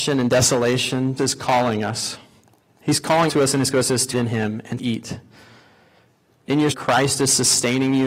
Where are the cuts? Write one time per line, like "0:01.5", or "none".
0:01.2
0:03.3
0:03.7
0:04.1
0:04.8
0:06.7

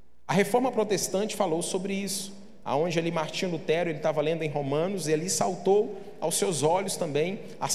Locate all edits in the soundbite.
none

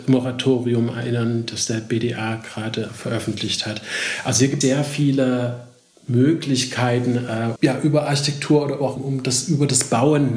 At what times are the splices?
0:02.9
0:04.6
0:07.6
0:09.0

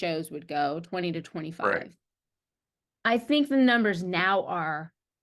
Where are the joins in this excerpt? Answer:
none

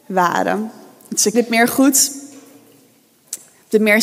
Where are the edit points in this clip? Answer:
0:01.3

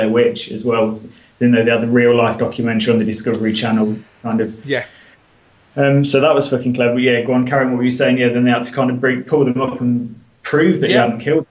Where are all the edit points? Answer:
none

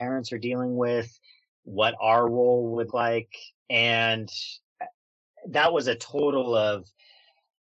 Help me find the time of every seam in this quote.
0:02.9

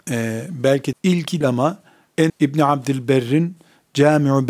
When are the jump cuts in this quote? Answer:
0:00.9
0:01.4
0:02.3

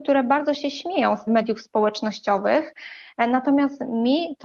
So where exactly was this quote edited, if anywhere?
0:01.3

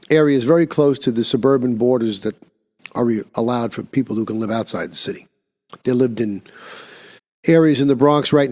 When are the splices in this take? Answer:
0:07.2

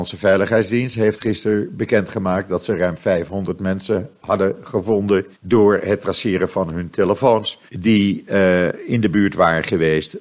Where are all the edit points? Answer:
0:05.4
0:07.7

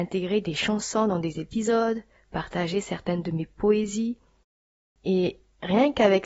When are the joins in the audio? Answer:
none

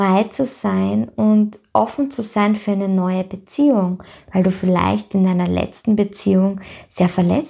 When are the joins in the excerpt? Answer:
none

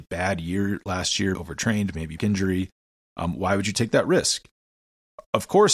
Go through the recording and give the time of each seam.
0:01.3
0:02.2

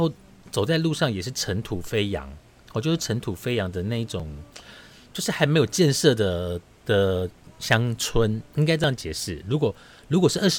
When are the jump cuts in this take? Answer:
none

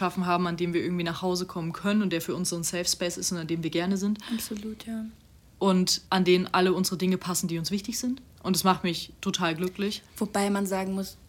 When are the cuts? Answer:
0:06.1
0:08.3

